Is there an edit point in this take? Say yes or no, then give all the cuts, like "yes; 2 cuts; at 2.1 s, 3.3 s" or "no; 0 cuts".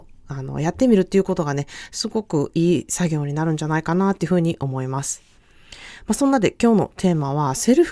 no; 0 cuts